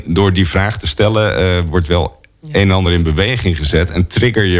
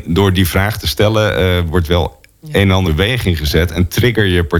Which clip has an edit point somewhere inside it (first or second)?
second